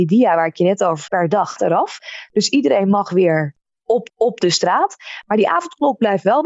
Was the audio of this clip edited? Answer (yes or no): yes